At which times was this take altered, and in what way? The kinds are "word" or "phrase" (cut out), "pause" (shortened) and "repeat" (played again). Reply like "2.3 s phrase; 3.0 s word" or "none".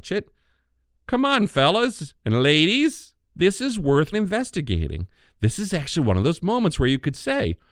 3.2 s pause; 4.1 s phrase